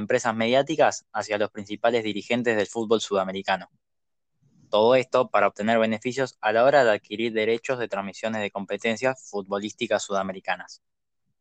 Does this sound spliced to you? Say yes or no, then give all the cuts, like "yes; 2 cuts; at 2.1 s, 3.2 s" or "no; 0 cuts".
no; 0 cuts